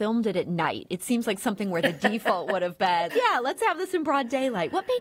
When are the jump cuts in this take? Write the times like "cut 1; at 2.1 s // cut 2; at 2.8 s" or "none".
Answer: cut 1; at 3.1 s